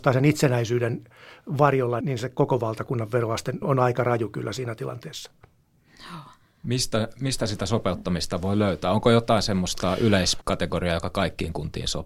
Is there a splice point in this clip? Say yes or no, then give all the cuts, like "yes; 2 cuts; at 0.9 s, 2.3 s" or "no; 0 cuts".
yes; 3 cuts; at 2.0 s, 3.6 s, 10.4 s